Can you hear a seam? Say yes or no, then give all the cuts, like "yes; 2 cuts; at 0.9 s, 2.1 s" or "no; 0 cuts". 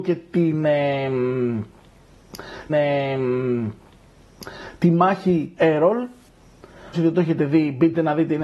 yes; 3 cuts; at 2.7 s, 5.6 s, 6.9 s